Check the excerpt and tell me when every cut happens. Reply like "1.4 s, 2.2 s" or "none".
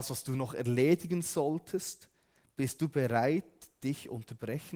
none